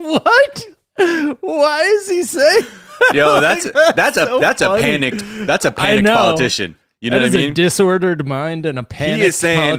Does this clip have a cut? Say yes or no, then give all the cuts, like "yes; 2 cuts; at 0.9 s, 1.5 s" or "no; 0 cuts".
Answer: no; 0 cuts